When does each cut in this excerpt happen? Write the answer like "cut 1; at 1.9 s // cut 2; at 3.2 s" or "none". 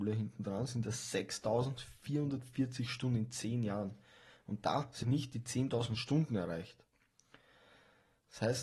cut 1; at 5.0 s